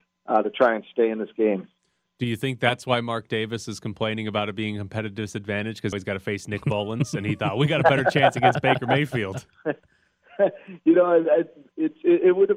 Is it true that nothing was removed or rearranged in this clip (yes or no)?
no